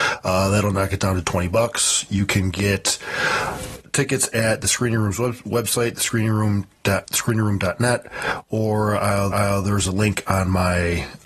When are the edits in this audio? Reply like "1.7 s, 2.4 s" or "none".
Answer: 7.0 s, 9.3 s